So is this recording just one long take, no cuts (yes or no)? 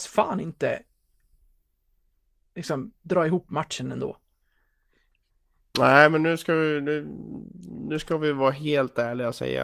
yes